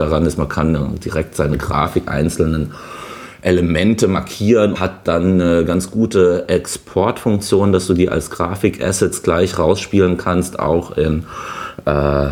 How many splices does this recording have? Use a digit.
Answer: 2